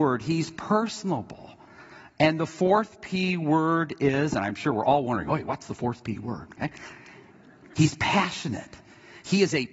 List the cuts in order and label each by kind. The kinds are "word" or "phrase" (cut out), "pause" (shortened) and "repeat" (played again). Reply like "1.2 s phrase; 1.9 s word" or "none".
none